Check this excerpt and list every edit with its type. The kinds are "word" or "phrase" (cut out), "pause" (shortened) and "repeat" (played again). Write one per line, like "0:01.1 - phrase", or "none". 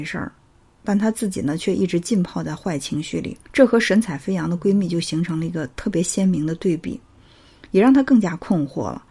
0:03.4 - pause